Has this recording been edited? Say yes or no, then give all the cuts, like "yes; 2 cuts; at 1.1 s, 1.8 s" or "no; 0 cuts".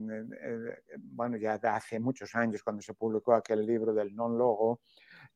no; 0 cuts